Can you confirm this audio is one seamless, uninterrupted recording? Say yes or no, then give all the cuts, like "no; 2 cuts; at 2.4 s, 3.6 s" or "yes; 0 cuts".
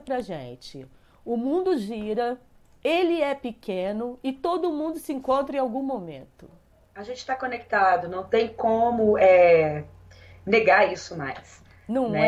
yes; 0 cuts